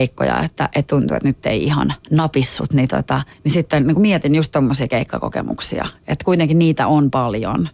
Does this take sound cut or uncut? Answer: cut